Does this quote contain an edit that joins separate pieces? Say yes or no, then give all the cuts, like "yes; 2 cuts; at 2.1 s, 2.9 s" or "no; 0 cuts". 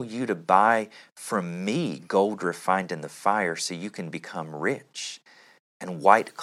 no; 0 cuts